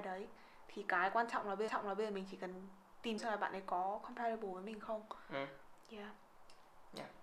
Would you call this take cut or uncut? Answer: cut